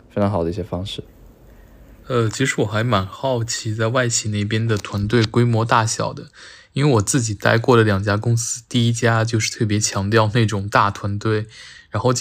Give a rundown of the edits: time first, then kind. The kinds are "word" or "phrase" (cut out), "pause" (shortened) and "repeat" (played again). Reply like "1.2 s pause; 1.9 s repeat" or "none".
none